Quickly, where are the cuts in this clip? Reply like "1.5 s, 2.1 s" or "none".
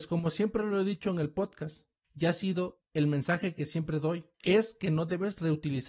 4.3 s

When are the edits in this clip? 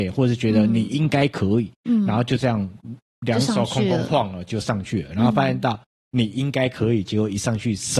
none

